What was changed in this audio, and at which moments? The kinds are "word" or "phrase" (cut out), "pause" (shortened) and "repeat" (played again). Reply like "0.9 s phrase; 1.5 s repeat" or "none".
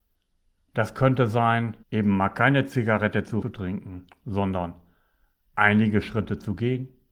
1.8 s pause; 3.4 s phrase